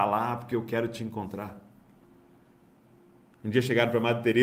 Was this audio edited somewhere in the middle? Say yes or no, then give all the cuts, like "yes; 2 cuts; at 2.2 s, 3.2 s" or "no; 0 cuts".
no; 0 cuts